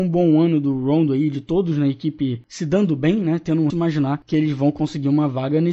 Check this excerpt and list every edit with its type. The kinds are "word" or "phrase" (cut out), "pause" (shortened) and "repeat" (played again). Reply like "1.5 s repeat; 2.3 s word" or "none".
3.7 s phrase